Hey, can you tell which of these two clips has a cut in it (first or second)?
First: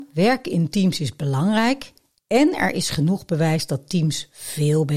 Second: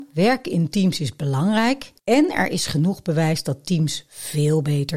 second